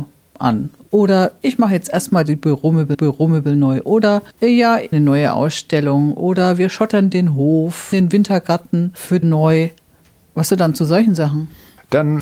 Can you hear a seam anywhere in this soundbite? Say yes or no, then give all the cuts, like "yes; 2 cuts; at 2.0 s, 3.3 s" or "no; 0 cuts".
yes; 5 cuts; at 2.9 s, 4.9 s, 7.9 s, 9.2 s, 10.5 s